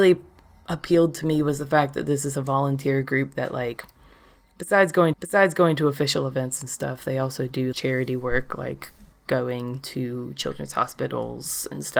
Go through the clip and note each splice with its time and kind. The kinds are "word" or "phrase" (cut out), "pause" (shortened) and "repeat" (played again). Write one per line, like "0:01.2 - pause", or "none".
0:05.1 - repeat
0:07.7 - word